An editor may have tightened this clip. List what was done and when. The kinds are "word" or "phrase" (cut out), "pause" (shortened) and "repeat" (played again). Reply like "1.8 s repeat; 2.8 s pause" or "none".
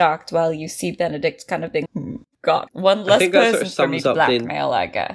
1.9 s word; 2.7 s phrase